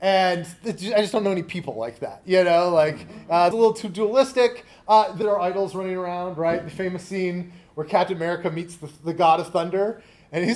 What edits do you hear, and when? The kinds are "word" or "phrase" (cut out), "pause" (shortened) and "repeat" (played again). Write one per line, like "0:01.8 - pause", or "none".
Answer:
0:03.5 - phrase
0:05.2 - phrase